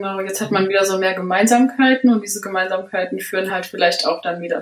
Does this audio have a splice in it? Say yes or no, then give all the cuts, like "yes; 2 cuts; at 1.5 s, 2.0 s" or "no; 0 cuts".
no; 0 cuts